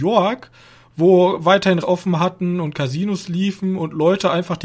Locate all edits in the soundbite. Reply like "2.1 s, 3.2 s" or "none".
1.8 s